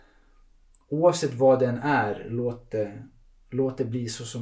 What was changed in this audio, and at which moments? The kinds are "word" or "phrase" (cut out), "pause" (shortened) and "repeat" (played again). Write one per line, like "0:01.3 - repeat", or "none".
none